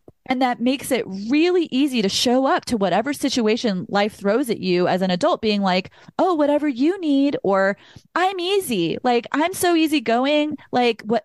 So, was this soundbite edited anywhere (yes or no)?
no